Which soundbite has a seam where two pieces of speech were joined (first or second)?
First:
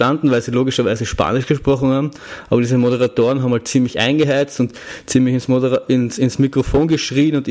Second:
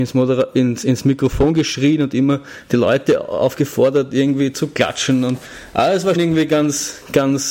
second